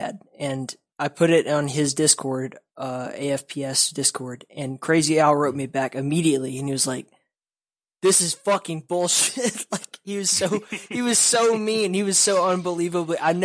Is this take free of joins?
yes; 0 cuts

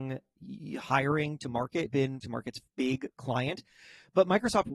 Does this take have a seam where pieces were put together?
yes; 4 cuts; at 1.4 s, 1.9 s, 2.2 s, 2.7 s

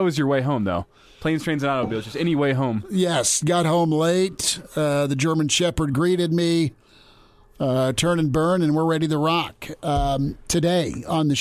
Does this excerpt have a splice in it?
no; 0 cuts

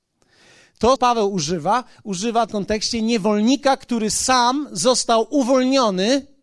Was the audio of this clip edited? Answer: yes; 2 cuts; at 1.0 s, 2.5 s

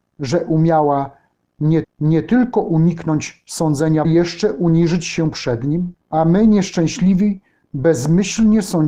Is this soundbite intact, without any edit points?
no; 3 cuts; at 1.8 s, 4.0 s, 6.0 s

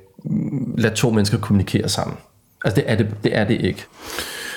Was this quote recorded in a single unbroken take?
yes; 0 cuts

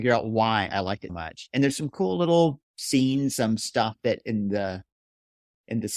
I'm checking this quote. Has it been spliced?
yes; 1 cut; at 1.1 s

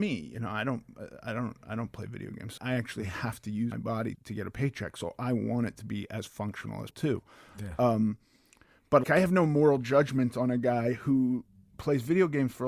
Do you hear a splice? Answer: yes; 5 cuts; at 2.6 s, 3.7 s, 4.1 s, 6.9 s, 9.0 s

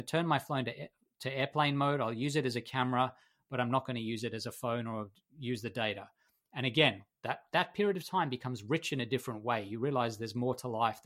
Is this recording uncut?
yes; 0 cuts

